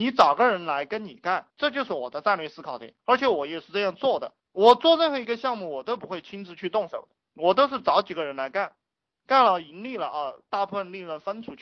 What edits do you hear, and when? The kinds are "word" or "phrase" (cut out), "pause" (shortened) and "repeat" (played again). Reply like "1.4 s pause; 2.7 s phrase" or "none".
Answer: 1.5 s pause; 3.0 s pause; 4.4 s pause